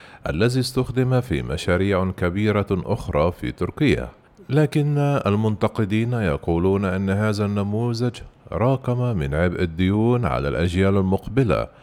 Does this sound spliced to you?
no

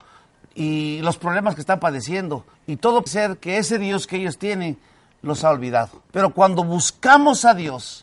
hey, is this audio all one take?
no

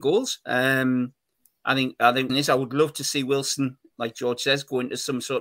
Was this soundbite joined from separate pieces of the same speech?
yes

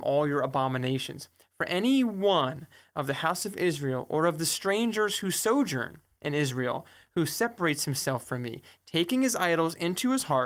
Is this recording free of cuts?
yes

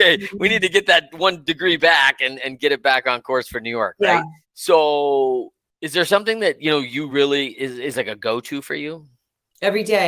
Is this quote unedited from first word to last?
yes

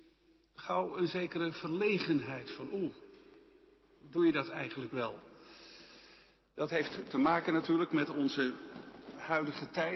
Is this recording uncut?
yes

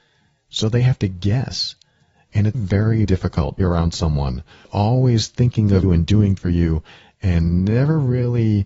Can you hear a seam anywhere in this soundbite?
yes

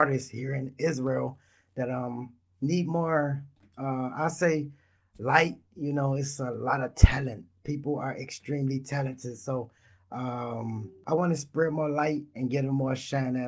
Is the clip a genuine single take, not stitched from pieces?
yes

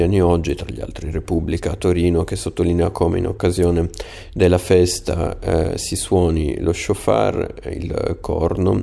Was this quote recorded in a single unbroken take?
yes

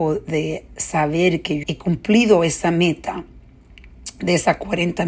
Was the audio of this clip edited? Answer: yes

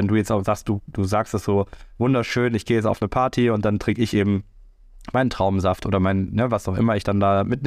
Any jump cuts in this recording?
no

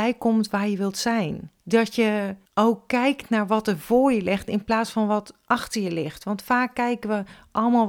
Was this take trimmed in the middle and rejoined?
yes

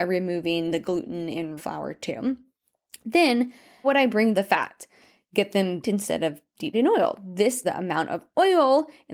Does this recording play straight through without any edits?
no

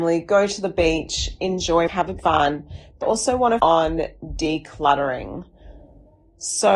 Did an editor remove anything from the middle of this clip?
yes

